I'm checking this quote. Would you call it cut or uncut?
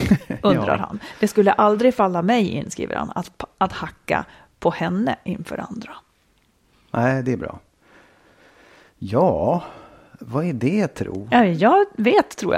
uncut